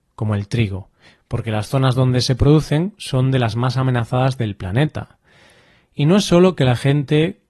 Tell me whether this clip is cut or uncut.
uncut